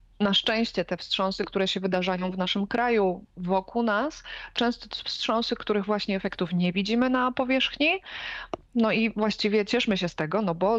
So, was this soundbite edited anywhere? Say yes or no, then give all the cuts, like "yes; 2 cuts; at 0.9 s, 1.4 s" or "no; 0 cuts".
yes; 2 cuts; at 3.3 s, 4.6 s